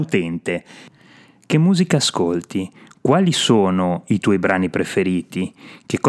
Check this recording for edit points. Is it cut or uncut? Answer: uncut